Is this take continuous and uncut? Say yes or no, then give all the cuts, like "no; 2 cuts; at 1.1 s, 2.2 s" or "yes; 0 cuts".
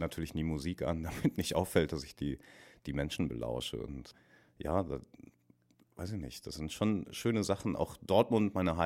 yes; 0 cuts